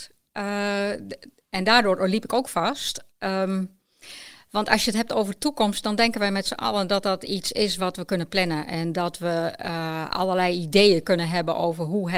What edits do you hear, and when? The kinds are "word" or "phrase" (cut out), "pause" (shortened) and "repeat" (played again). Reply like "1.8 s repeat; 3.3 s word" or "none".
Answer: 3.1 s pause